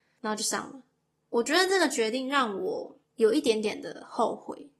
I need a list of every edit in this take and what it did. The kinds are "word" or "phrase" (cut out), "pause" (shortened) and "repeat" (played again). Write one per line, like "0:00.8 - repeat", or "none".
0:03.0 - pause